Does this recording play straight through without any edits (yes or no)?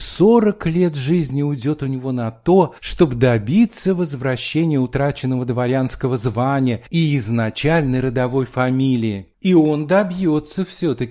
yes